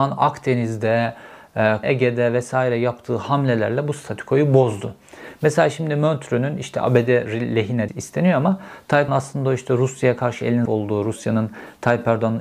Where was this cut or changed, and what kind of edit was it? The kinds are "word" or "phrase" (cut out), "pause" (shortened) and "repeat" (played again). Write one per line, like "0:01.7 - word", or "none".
0:01.8 - word
0:07.9 - word
0:09.1 - word
0:10.7 - word